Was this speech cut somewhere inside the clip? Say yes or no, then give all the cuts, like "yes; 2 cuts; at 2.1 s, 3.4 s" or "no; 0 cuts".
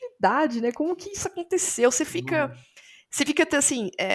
no; 0 cuts